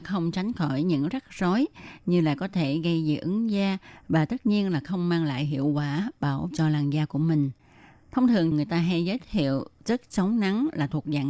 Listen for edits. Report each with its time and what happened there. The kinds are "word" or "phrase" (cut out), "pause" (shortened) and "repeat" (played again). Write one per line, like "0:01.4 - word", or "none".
0:06.5 - word
0:08.5 - phrase